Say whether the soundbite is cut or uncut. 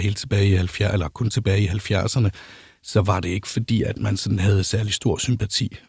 uncut